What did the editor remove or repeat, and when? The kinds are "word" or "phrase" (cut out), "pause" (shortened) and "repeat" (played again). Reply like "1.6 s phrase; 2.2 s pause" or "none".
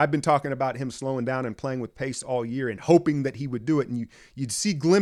none